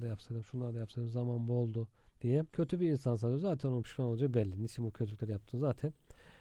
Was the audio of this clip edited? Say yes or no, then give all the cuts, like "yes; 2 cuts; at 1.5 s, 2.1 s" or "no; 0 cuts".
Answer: yes; 1 cut; at 2.5 s